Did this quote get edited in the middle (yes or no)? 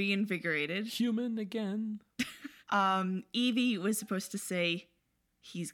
yes